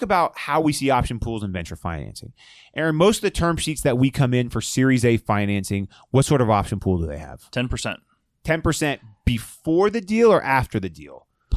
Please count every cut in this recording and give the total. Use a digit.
0